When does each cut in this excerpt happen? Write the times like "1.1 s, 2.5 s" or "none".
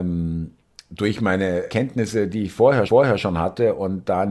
1.7 s, 2.9 s